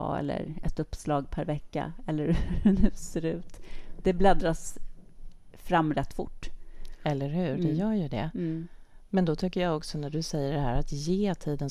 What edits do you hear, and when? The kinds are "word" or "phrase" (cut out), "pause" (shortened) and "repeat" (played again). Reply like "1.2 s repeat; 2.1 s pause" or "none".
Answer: none